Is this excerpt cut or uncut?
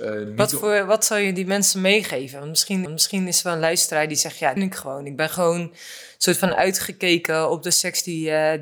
cut